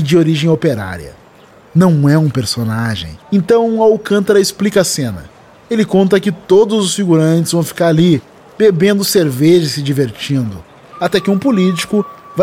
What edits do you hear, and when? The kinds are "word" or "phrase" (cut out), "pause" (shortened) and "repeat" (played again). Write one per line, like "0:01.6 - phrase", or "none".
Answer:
0:03.2 - pause